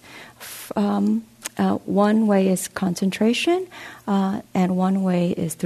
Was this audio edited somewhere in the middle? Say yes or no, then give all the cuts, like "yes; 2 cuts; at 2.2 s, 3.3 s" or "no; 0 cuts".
yes; 1 cut; at 4.5 s